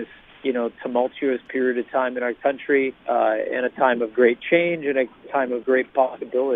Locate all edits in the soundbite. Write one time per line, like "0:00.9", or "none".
0:03.0